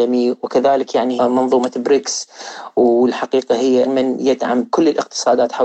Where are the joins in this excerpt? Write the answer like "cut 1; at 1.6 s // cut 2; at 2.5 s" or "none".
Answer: cut 1; at 1.2 s // cut 2; at 3.8 s